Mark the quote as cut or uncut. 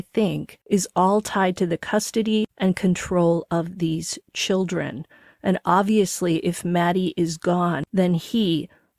uncut